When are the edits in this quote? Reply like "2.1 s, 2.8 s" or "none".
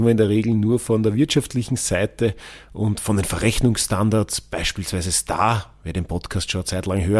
none